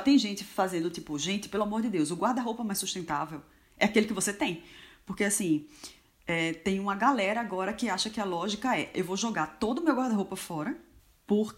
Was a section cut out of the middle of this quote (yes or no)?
no